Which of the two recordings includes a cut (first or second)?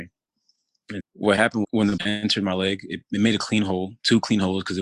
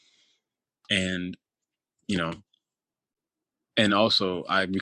first